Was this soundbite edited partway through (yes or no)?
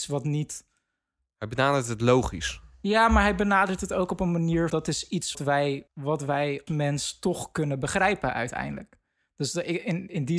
yes